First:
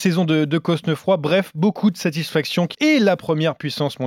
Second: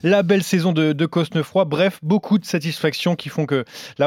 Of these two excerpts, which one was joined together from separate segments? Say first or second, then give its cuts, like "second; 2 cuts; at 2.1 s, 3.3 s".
first; 1 cut; at 2.7 s